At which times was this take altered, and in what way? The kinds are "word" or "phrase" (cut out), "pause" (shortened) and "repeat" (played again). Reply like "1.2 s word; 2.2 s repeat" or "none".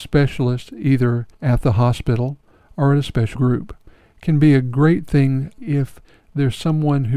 1.3 s pause; 3.4 s word; 5.6 s word